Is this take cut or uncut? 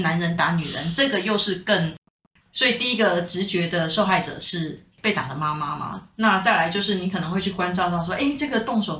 uncut